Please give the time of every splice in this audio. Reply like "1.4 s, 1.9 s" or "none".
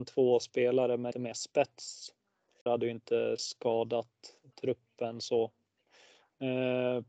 1.1 s, 2.7 s